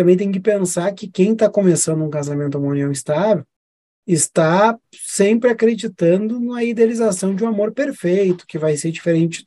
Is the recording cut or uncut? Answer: uncut